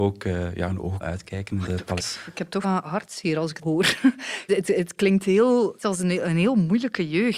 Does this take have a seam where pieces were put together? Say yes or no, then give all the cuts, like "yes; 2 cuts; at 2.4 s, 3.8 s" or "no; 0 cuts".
yes; 7 cuts; at 1.0 s, 1.7 s, 2.0 s, 2.6 s, 3.6 s, 4.5 s, 5.8 s